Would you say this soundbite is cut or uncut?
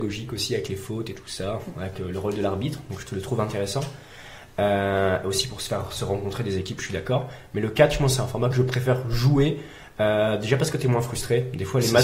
uncut